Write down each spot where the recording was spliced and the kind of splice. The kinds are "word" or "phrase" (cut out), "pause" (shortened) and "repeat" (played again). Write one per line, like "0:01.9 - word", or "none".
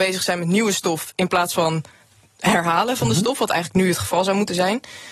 none